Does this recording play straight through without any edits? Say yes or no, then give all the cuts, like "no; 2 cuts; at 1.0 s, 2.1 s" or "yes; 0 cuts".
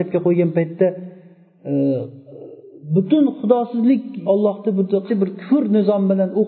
no; 2 cuts; at 4.3 s, 5.1 s